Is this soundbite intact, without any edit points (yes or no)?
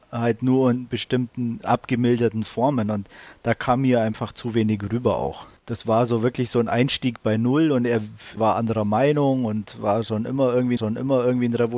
no